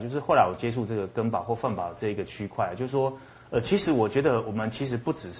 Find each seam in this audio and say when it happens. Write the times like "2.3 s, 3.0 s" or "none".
none